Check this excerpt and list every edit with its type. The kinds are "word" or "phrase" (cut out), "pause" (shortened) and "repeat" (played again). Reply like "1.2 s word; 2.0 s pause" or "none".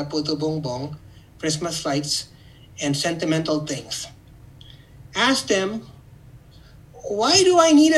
none

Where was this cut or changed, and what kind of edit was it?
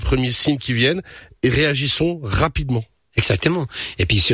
none

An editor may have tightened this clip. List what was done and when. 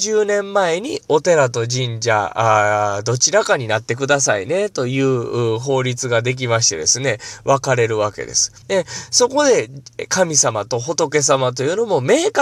8.6 s pause

